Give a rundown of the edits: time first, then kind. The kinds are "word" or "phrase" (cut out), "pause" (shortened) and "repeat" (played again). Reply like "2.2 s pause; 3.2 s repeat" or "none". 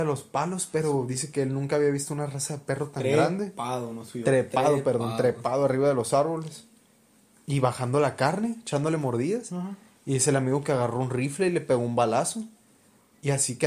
none

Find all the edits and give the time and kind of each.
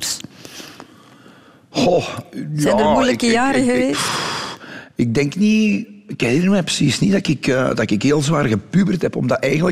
none

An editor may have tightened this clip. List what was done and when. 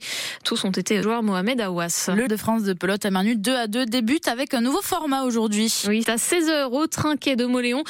1.0 s phrase; 2.3 s word; 6.0 s word

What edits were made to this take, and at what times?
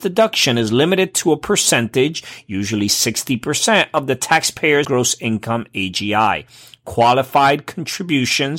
4.8 s word

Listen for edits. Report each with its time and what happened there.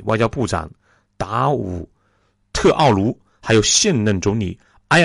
none

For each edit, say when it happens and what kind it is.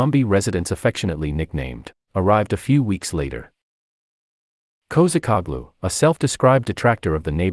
2.1 s word

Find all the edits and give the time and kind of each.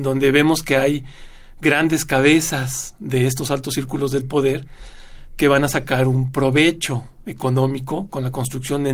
none

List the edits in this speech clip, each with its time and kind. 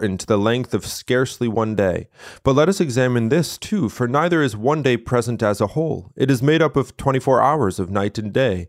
none

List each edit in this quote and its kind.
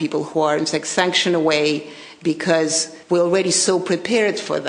3.0 s pause

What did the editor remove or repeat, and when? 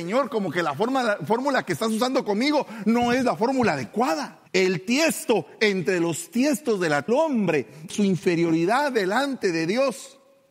4.5 s pause; 7.1 s phrase; 7.9 s word

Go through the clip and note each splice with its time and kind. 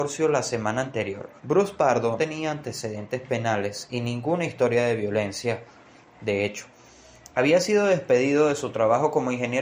1.4 s pause; 2.2 s word

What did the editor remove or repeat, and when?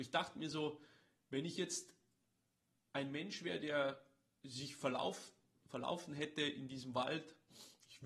none

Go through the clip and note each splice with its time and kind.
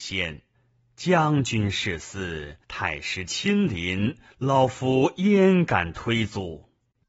2.6 s pause

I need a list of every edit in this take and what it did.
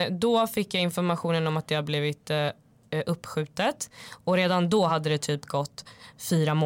none

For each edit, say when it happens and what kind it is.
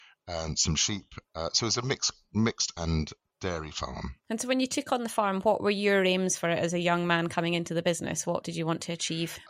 2.8 s word; 4.2 s pause

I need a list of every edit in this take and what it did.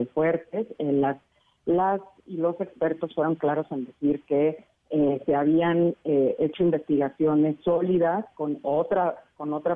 none

